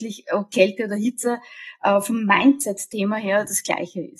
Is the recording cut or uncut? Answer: uncut